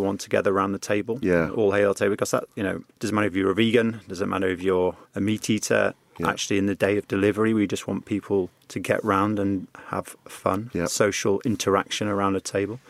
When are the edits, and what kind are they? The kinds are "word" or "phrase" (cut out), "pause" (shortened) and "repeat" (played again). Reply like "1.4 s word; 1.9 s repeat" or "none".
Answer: 2.9 s pause; 5.1 s pause